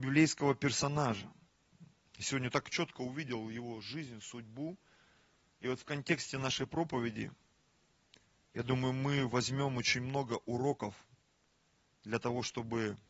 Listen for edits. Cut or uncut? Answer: uncut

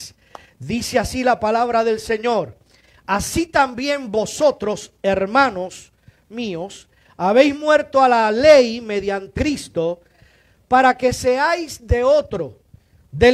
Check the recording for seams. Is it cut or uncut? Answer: cut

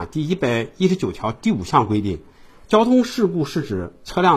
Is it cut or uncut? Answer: uncut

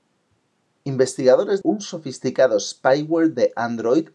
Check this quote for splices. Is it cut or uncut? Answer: cut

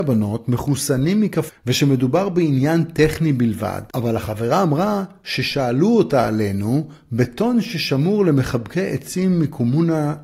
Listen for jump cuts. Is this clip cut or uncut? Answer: cut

